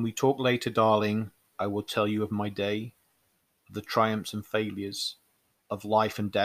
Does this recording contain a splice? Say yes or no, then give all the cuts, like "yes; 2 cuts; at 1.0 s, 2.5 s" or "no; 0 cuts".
no; 0 cuts